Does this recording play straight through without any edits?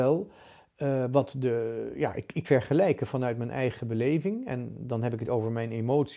no; 2 cuts; at 2.4 s, 5.2 s

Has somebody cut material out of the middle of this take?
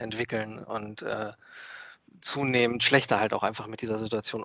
no; 0 cuts

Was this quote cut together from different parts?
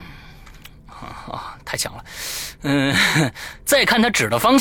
no; 0 cuts

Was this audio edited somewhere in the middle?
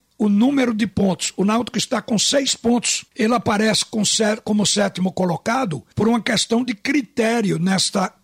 yes; 2 cuts; at 3.1 s, 5.9 s

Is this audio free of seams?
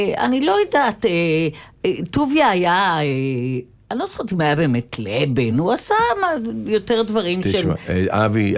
yes; 0 cuts

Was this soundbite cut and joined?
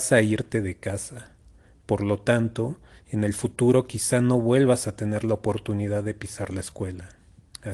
no; 0 cuts

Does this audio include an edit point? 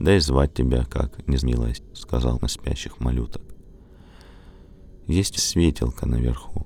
yes; 4 cuts; at 1.4 s, 1.7 s, 2.3 s, 5.4 s

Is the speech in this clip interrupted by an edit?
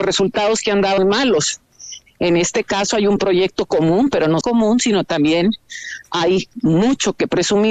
yes; 2 cuts; at 1.0 s, 4.4 s

